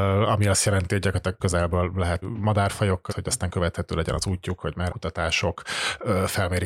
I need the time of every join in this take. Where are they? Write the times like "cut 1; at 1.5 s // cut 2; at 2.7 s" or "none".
cut 1; at 1.4 s // cut 2; at 2.2 s // cut 3; at 3.1 s // cut 4; at 4.9 s